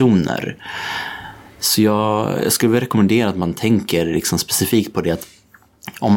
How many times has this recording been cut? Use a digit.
0